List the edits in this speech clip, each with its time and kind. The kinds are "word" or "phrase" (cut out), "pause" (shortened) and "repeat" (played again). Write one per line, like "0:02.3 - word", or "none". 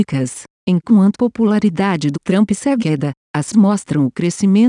0:01.1 - word
0:02.1 - word
0:02.8 - word
0:03.5 - word